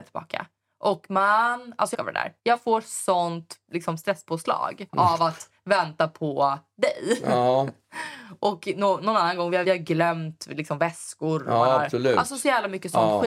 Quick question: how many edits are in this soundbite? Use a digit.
4